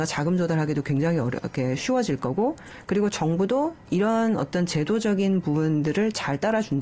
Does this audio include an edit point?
no; 0 cuts

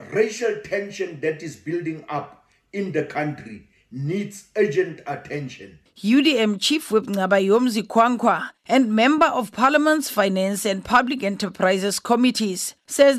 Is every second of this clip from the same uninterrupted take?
yes; 0 cuts

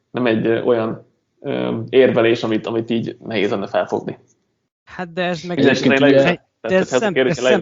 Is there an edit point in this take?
no; 0 cuts

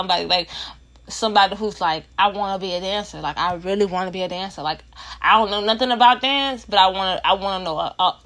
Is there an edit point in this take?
yes; 1 cut; at 2.1 s

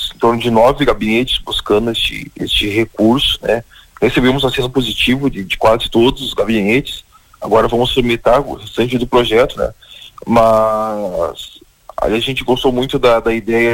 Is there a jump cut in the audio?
no; 0 cuts

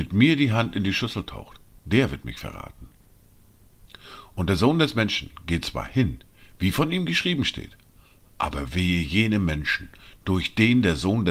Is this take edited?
no; 0 cuts

